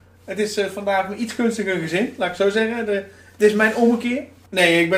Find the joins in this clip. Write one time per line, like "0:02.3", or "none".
none